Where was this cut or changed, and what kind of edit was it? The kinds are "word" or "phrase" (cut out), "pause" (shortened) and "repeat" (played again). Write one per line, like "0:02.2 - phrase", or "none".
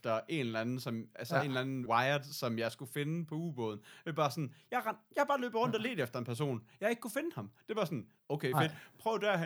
0:01.9 - word